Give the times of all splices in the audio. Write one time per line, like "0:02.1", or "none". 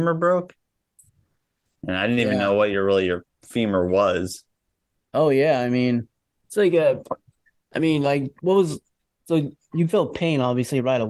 none